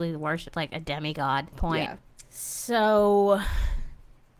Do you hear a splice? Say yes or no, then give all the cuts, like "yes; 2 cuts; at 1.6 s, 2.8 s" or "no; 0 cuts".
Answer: yes; 1 cut; at 1.5 s